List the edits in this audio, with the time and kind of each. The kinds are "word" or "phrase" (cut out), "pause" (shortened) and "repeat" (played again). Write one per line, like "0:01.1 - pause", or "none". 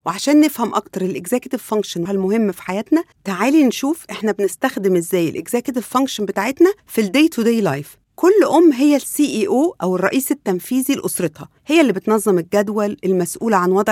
0:02.1 - word
0:03.1 - pause
0:06.8 - pause
0:08.0 - pause
0:11.6 - pause